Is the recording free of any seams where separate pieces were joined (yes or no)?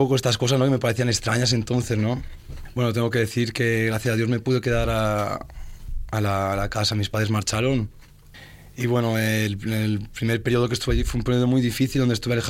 yes